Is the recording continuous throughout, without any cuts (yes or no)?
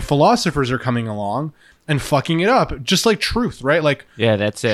yes